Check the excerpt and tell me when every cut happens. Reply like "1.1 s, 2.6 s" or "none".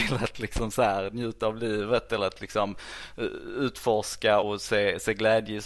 4.4 s

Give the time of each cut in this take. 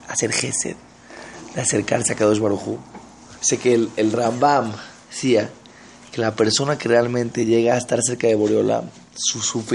3.4 s

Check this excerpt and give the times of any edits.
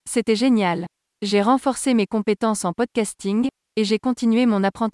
none

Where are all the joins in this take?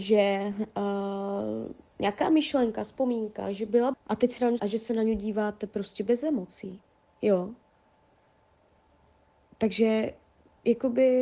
3.9 s, 4.6 s

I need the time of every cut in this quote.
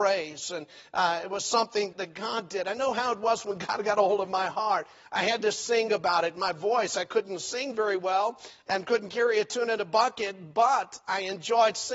1.9 s

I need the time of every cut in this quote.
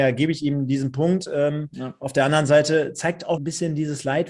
3.4 s

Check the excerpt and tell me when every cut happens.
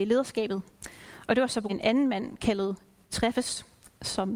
1.7 s, 3.1 s

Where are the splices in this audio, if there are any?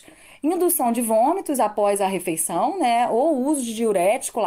none

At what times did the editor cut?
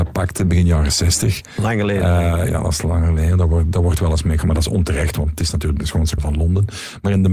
4.4 s, 6.2 s

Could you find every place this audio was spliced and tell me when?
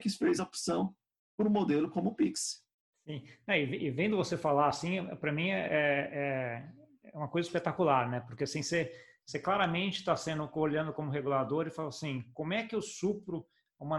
none

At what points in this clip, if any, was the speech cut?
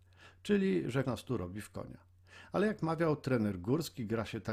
1.0 s

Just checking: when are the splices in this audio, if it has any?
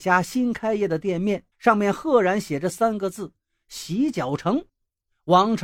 1.5 s, 4.7 s

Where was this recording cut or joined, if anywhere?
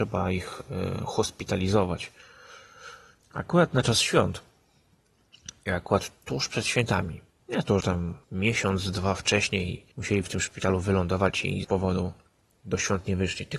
3.2 s, 7.4 s, 7.8 s, 8.2 s, 9.9 s, 11.6 s

